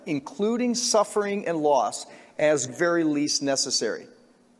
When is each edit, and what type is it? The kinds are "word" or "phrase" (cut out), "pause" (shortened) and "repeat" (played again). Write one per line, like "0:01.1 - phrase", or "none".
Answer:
0:02.7 - phrase